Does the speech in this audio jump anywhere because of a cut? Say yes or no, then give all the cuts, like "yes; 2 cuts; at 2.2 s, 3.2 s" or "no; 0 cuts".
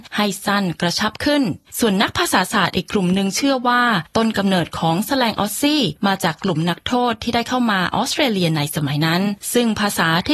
yes; 1 cut; at 1.7 s